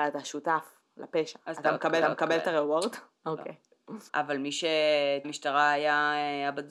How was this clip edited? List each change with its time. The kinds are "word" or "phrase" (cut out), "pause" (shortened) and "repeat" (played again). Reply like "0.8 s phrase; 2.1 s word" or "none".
2.0 s repeat; 4.1 s pause; 5.2 s phrase

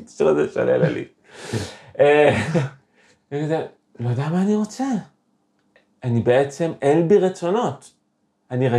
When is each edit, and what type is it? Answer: none

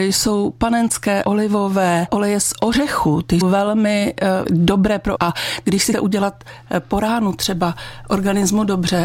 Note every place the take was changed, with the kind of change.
1.2 s word; 2.1 s word; 3.4 s word; 4.4 s word; 5.2 s word; 5.9 s word

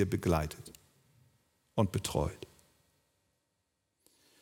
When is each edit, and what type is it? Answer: none

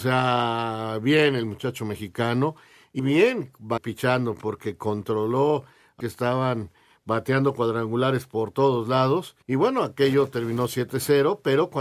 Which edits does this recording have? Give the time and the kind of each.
3.0 s word; 3.8 s word; 6.0 s phrase; 9.4 s pause

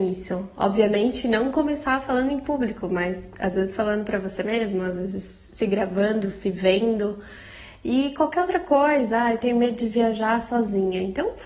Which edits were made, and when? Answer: none

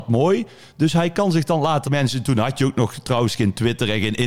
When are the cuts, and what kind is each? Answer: 1.8 s phrase

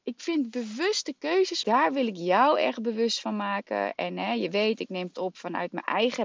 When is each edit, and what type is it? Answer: 1.6 s word; 5.1 s word

